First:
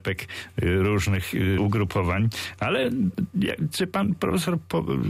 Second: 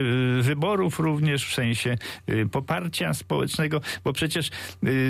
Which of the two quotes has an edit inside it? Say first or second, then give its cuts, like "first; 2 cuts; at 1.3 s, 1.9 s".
first; 1 cut; at 1.6 s